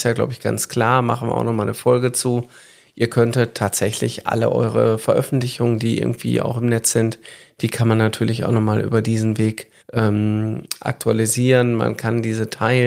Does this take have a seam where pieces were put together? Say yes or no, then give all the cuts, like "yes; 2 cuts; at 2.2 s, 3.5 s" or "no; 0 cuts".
yes; 1 cut; at 9.8 s